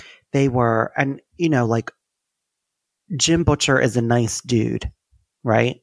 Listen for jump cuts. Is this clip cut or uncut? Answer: uncut